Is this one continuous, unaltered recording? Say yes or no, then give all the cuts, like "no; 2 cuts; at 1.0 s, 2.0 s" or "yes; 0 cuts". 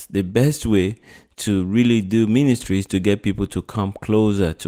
yes; 0 cuts